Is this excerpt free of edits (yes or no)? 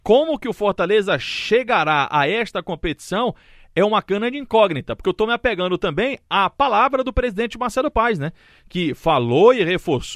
yes